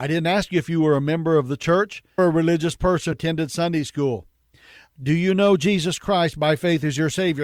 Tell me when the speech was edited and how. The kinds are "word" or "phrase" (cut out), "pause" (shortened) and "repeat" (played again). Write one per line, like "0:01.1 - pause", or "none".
0:02.2 - word
0:03.1 - word